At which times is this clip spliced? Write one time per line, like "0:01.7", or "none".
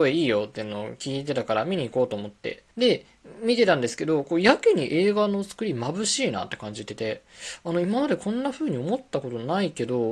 0:02.7